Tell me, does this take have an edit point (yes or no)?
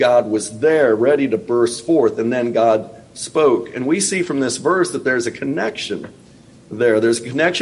no